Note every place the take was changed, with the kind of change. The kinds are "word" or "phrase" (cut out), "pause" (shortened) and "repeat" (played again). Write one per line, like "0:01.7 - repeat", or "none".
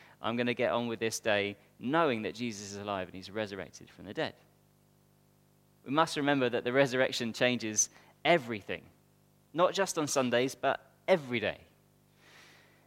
none